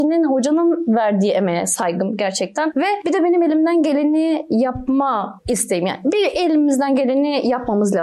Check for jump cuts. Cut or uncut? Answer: uncut